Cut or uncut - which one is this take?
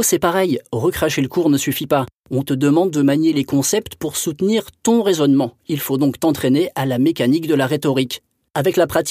uncut